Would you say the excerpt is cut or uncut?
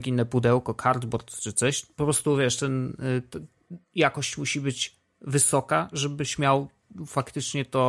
cut